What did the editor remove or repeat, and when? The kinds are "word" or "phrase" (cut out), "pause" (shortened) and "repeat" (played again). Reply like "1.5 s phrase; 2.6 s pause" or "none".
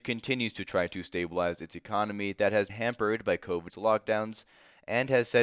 2.7 s word; 3.7 s word